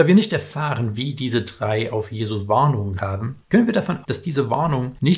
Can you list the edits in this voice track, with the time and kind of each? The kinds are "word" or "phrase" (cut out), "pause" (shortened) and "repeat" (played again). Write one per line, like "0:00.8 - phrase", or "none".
0:03.0 - word
0:04.0 - word